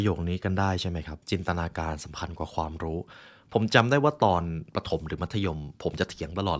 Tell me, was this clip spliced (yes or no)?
yes